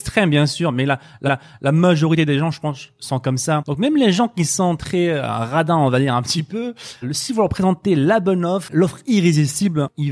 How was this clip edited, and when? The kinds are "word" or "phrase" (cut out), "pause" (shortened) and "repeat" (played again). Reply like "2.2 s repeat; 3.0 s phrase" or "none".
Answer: 1.3 s repeat; 7.0 s word; 8.7 s word

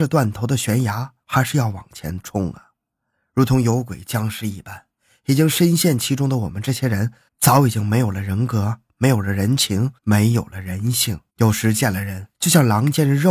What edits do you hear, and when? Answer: 1.2 s pause; 7.3 s pause; 10.0 s pause; 11.3 s pause; 12.3 s pause

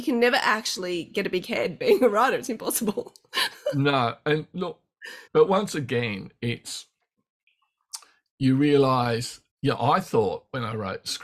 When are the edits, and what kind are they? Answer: 5.3 s pause; 9.5 s pause

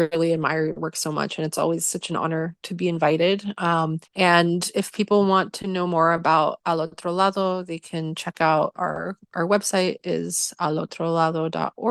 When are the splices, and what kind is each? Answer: 4.1 s pause

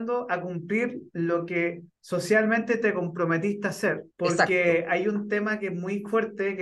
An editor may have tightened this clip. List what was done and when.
1.9 s pause; 4.1 s pause

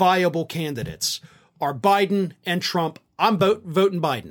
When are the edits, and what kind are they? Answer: none

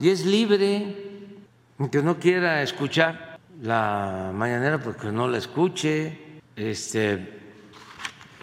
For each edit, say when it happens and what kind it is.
6.4 s pause

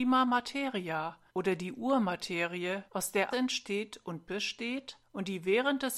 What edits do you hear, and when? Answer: 1.3 s pause; 2.9 s pause; 3.3 s word; 5.0 s pause

